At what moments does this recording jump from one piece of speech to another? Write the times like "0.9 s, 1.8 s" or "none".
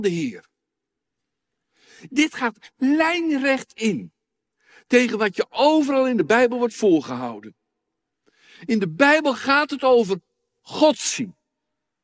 none